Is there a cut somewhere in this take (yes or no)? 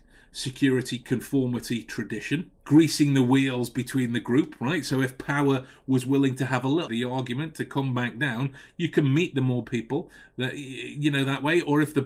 yes